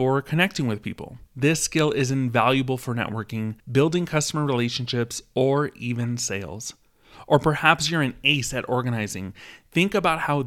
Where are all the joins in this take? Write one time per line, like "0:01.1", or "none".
0:01.3
0:03.6